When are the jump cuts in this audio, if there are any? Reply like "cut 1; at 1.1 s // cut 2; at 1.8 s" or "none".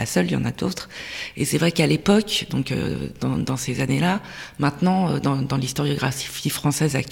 none

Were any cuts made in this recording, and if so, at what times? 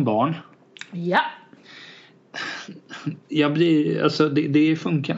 cut 1; at 3.2 s

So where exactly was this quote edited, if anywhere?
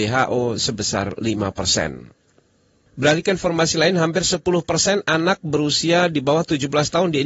none

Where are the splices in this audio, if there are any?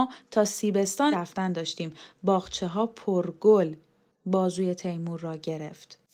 cut 1; at 1.1 s

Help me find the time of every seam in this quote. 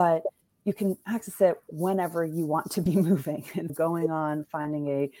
cut 1; at 3.7 s

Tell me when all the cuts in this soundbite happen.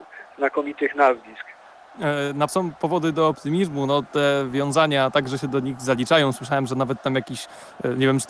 cut 1; at 2.5 s

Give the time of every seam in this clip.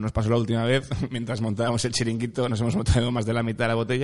none

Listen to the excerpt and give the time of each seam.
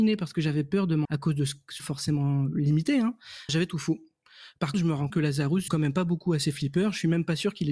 cut 1; at 1.0 s // cut 2; at 1.8 s // cut 3; at 3.5 s // cut 4; at 4.7 s // cut 5; at 5.1 s // cut 6; at 5.7 s

